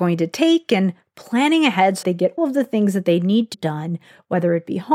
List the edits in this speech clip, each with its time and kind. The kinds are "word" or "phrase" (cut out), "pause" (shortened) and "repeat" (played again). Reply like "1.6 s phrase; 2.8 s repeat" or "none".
2.0 s word; 2.4 s word; 3.5 s word